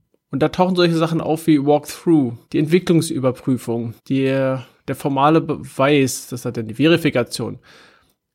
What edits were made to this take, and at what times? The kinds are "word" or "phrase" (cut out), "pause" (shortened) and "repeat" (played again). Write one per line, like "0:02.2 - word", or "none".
0:02.4 - pause
0:04.0 - pause